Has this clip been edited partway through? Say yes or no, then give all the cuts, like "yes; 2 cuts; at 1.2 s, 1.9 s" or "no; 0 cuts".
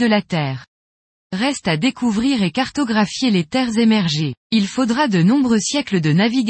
yes; 1 cut; at 4.4 s